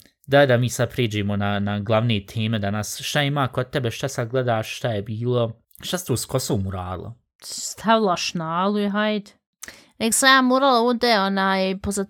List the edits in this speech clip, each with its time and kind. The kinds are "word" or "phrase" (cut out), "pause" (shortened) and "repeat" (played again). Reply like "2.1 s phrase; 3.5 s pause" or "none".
none